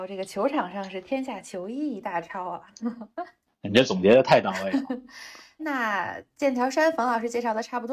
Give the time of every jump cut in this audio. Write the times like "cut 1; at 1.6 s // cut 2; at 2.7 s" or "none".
cut 1; at 5.6 s